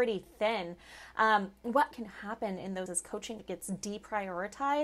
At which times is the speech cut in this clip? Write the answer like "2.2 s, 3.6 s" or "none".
1.9 s, 2.9 s, 3.4 s